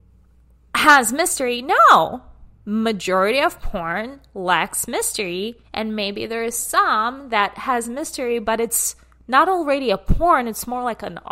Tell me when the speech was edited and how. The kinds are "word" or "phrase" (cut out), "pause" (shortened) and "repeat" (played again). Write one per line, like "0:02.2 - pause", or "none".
0:05.6 - pause